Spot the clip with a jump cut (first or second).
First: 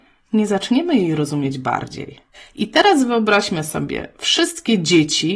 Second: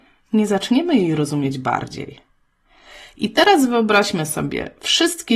first